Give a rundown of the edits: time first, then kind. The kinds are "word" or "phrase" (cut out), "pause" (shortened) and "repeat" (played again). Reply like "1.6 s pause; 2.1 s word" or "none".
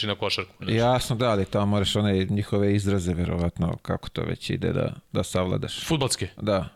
none

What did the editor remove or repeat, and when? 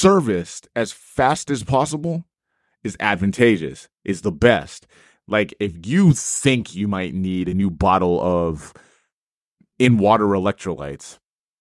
none

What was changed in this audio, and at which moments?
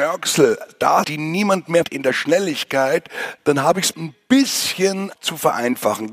1.0 s word; 1.8 s word; 3.9 s word

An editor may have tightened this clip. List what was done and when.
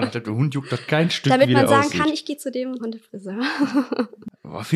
2.8 s word

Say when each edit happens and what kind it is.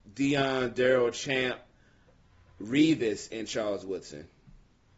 none

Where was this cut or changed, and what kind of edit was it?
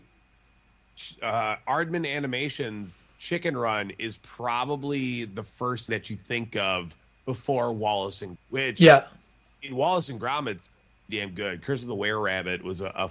5.9 s word; 8.4 s word; 11.1 s word

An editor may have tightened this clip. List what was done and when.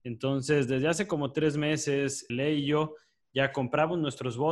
2.3 s word

